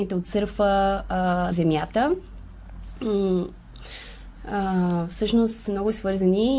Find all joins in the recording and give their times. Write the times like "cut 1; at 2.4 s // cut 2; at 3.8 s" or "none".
cut 1; at 1.5 s // cut 2; at 5.7 s